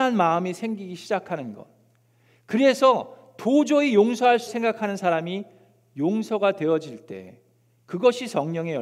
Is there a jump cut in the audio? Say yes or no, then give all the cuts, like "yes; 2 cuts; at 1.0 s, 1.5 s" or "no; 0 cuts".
yes; 1 cut; at 4.5 s